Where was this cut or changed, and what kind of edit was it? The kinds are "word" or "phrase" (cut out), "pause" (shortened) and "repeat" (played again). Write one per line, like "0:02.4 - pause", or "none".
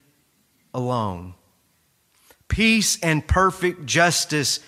none